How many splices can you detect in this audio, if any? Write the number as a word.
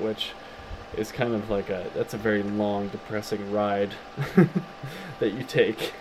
zero